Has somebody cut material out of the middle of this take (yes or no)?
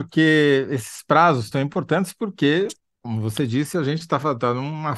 yes